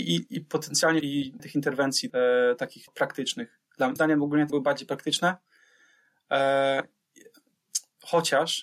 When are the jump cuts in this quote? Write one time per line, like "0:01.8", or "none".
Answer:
0:01.0
0:01.4
0:02.1
0:02.9
0:04.0
0:04.5